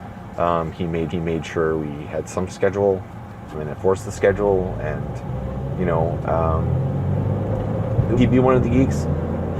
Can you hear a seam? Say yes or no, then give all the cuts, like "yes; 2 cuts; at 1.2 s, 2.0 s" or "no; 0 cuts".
yes; 5 cuts; at 1.1 s, 2.5 s, 3.5 s, 8.2 s, 8.6 s